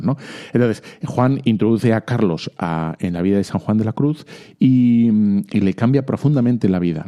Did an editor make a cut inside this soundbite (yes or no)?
no